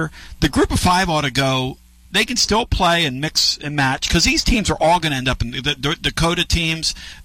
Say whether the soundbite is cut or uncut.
uncut